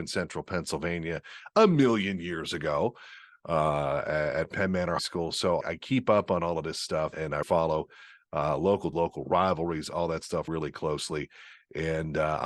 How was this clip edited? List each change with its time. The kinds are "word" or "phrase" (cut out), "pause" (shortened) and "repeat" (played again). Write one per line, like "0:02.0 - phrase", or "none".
0:05.0 - word
0:05.6 - word
0:07.1 - word
0:07.4 - word
0:08.9 - word
0:10.5 - word